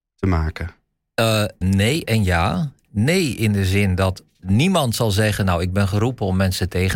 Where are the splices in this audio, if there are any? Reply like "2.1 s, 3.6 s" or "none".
1.6 s, 4.4 s